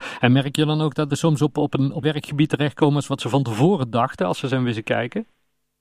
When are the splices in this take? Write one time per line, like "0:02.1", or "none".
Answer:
0:01.1
0:01.5
0:02.0